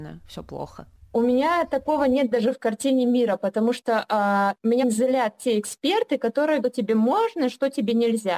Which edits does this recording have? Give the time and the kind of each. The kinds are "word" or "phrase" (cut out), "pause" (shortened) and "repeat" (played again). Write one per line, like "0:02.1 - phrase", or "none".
0:04.8 - word
0:06.6 - phrase